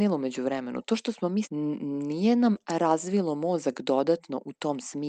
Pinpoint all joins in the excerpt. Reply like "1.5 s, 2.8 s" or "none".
1.4 s